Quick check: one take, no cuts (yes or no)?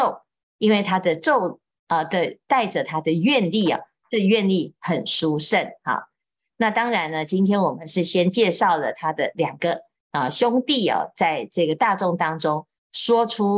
yes